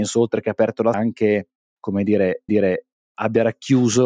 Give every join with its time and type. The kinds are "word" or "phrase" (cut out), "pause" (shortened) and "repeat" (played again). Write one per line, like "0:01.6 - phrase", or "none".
0:00.9 - word
0:02.5 - repeat